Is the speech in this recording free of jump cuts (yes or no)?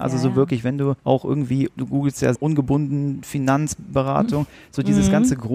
no